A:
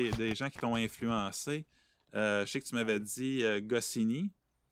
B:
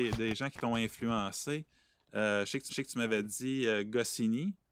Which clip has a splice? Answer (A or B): B